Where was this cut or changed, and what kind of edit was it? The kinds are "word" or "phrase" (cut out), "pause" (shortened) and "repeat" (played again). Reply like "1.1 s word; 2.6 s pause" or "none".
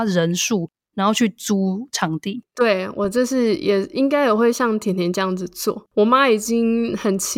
5.9 s pause